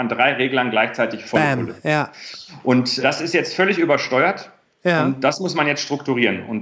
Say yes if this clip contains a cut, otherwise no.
yes